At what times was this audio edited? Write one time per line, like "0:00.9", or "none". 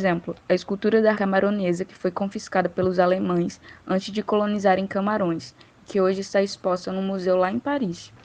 0:01.1